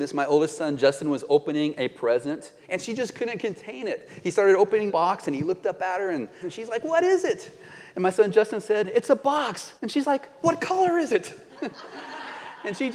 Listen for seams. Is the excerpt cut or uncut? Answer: cut